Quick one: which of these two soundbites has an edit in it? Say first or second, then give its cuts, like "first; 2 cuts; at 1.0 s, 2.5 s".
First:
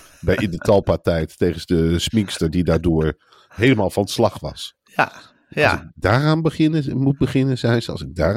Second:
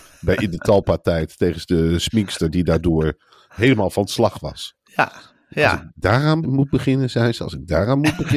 second; 1 cut; at 6.4 s